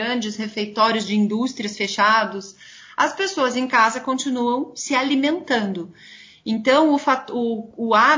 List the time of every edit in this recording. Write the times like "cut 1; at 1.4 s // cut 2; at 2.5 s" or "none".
none